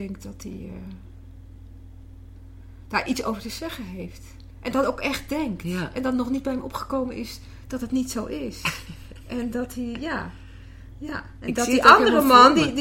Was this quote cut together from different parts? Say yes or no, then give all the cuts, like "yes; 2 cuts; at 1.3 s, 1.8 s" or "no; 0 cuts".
no; 0 cuts